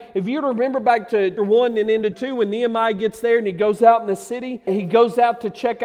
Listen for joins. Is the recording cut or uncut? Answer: cut